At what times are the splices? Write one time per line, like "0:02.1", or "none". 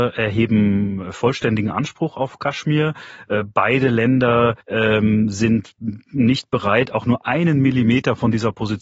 0:04.6